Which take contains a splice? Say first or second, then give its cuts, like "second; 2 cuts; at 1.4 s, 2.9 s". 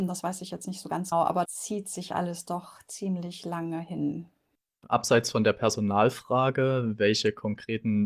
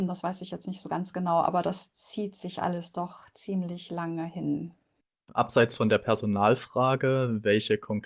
first; 2 cuts; at 1.1 s, 1.4 s